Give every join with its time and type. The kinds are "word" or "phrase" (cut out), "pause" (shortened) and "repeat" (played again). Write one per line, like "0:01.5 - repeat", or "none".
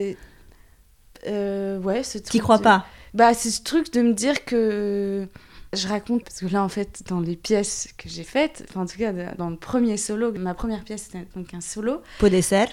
0:06.2 - word